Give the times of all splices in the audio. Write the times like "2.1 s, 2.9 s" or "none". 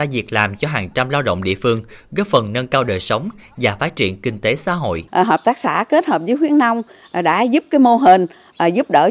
5.1 s